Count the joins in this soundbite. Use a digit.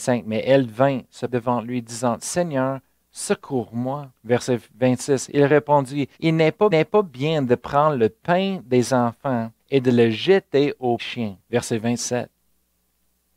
7